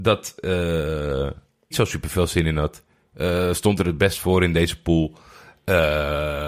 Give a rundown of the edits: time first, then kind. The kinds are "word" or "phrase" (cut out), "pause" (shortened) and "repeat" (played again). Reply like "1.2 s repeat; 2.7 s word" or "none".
1.7 s word